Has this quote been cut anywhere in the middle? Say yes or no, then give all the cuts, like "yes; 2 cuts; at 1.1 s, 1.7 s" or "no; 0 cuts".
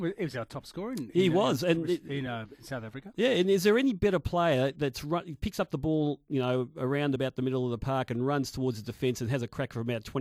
no; 0 cuts